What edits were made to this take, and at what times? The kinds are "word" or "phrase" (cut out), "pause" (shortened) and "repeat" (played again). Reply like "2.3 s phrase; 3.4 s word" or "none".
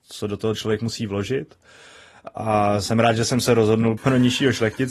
4.0 s word